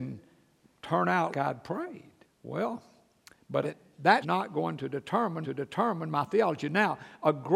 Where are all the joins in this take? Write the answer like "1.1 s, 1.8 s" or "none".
1.3 s, 2.2 s, 3.6 s, 4.2 s, 5.4 s